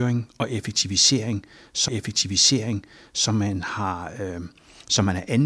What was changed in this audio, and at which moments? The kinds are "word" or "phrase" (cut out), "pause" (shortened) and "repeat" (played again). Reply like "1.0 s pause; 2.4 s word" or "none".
1.9 s repeat